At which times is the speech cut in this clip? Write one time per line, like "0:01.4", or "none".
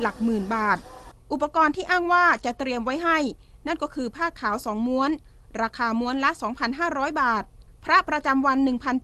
none